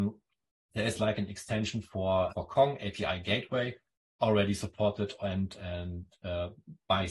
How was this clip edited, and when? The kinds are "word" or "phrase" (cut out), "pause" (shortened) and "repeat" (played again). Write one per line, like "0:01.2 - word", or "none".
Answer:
0:02.3 - word